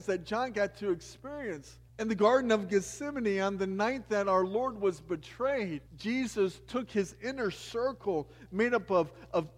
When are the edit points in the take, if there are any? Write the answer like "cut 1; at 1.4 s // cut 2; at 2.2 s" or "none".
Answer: cut 1; at 1.9 s // cut 2; at 5.9 s